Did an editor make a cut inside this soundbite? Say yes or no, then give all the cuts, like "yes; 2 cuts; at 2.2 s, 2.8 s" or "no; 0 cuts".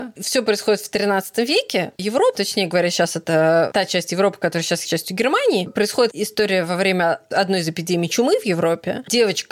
yes; 3 cuts; at 2.0 s, 2.4 s, 4.9 s